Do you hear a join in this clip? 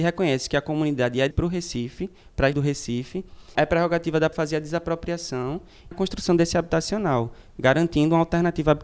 yes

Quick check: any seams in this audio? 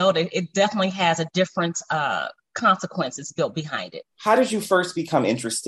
yes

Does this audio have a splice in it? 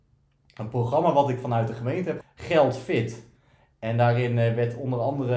yes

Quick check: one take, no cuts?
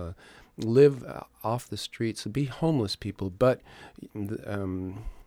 no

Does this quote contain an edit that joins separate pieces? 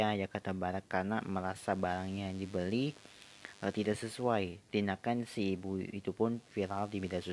no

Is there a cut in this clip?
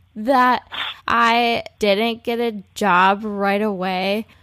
yes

